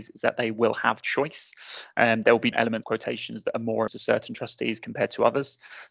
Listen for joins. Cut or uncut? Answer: cut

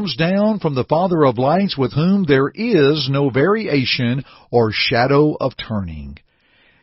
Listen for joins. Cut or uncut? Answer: uncut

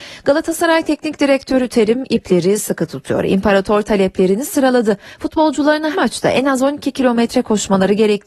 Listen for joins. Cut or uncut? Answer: cut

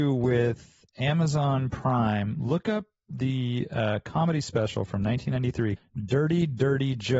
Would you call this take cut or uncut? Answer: cut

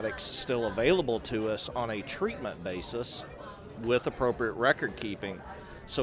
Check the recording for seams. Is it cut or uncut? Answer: uncut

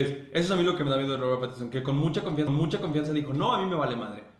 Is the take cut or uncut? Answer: cut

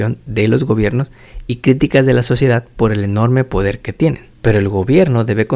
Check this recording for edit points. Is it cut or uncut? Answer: uncut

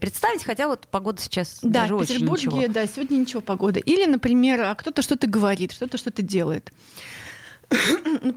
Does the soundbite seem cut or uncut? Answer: uncut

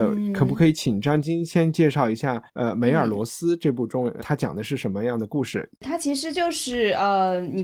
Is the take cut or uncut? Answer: cut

